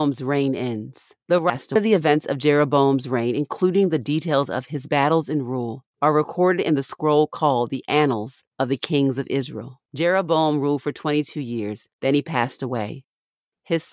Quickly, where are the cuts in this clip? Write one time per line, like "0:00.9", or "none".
0:01.2
0:05.9
0:08.5
0:09.9
0:11.9